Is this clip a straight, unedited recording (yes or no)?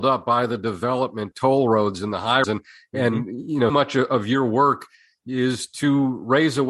no